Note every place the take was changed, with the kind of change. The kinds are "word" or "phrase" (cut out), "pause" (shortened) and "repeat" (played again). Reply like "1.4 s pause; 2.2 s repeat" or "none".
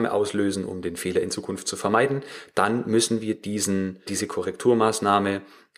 4.1 s word